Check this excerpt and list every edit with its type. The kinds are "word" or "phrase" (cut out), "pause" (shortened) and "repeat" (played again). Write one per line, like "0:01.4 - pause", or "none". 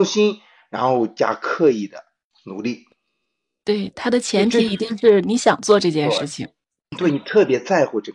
none